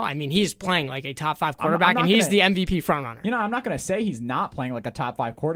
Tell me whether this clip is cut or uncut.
uncut